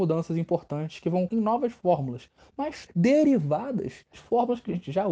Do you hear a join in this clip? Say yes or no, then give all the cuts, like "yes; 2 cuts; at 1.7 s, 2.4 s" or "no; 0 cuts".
yes; 3 cuts; at 1.3 s, 2.9 s, 4.1 s